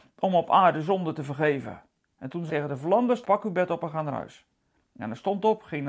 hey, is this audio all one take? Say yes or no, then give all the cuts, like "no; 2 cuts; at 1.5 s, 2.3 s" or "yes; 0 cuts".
no; 2 cuts; at 2.5 s, 3.2 s